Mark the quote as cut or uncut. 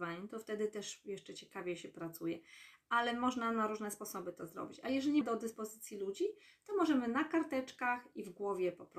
cut